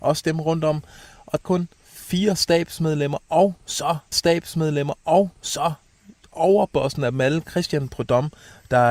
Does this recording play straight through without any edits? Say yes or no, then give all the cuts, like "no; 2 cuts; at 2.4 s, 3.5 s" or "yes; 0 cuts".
no; 3 cuts; at 1.4 s, 1.7 s, 4.1 s